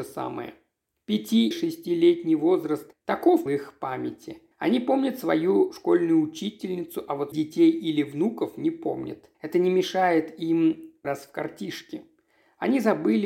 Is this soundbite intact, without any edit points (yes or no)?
no